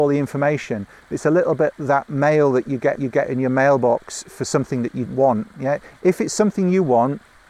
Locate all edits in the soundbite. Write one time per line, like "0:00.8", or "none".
0:01.7
0:03.0
0:05.1

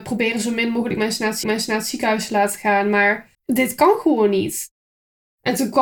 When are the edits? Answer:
0:01.4
0:03.3

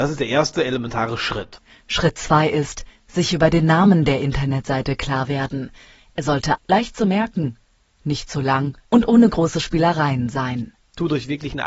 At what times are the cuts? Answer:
0:06.6
0:08.8

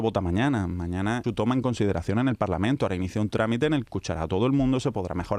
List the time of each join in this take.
0:01.2
0:03.9

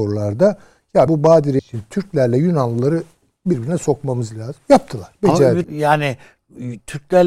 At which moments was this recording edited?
0:01.1
0:01.6
0:05.6

